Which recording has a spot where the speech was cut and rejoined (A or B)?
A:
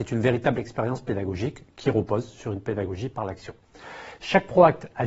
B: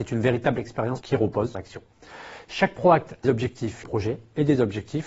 B